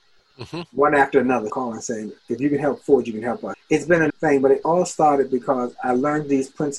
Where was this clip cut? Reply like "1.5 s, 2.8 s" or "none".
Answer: 1.5 s, 2.2 s, 3.5 s, 4.1 s, 4.6 s